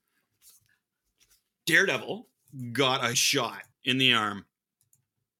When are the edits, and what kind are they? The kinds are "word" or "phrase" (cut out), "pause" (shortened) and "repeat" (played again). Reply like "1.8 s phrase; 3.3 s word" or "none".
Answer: 3.1 s word; 3.7 s pause